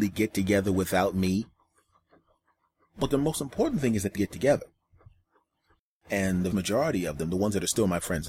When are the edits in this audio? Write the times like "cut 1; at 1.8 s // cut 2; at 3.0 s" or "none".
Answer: cut 1; at 4.1 s // cut 2; at 6.5 s